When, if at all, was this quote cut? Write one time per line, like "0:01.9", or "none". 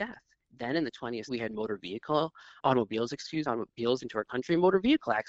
0:01.3
0:02.6
0:03.5
0:04.0